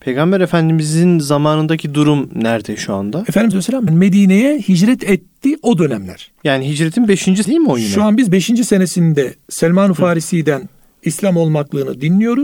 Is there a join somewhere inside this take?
yes; 3 cuts; at 3.5 s, 3.9 s, 7.4 s

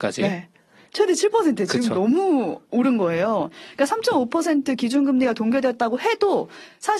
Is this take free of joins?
yes; 0 cuts

